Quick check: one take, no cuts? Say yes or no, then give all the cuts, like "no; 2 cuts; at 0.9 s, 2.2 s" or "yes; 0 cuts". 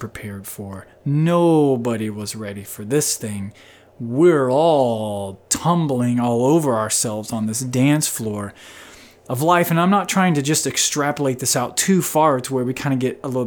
yes; 0 cuts